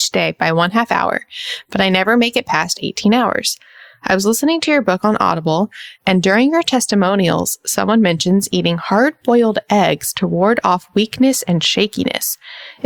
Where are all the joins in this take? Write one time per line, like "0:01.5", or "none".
none